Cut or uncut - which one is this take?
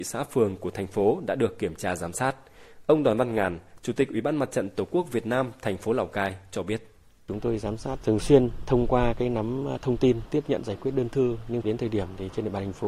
uncut